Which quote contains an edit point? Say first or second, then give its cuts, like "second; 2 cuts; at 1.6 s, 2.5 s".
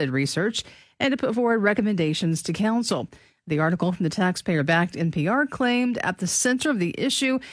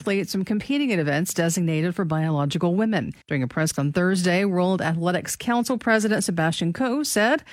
second; 2 cuts; at 3.2 s, 3.7 s